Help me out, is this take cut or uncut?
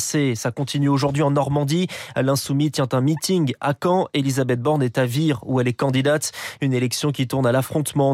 uncut